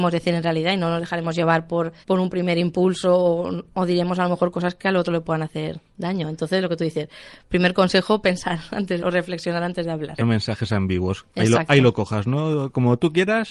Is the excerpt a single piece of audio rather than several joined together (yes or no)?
no